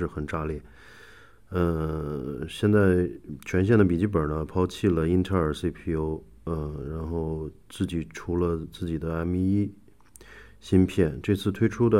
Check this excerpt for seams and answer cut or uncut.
uncut